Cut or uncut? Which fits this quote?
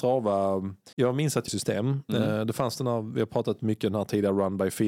cut